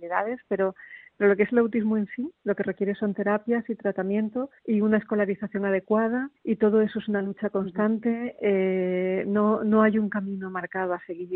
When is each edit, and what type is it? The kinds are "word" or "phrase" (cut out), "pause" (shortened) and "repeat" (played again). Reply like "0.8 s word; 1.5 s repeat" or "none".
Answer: 2.4 s pause; 4.6 s pause; 6.4 s pause